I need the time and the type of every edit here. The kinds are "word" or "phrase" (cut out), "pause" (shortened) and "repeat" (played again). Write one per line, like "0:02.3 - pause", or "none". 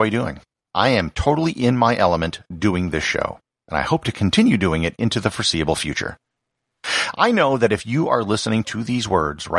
none